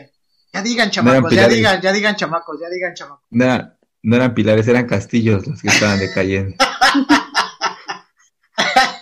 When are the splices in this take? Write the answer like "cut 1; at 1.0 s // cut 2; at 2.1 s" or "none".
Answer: none